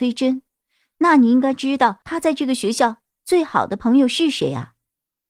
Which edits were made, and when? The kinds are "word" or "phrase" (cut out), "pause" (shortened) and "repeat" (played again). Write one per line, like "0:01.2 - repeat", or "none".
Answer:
0:02.0 - pause